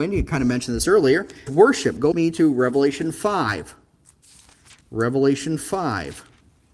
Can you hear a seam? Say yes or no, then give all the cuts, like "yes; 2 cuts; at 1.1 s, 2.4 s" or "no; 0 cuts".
yes; 3 cuts; at 1.5 s, 2.1 s, 4.8 s